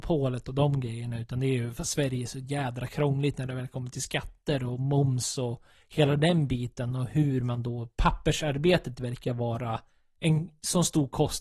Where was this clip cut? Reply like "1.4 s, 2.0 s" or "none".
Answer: none